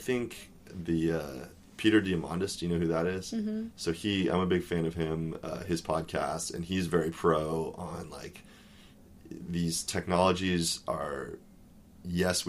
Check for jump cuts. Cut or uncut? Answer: uncut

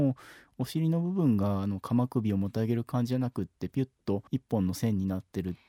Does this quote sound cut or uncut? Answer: cut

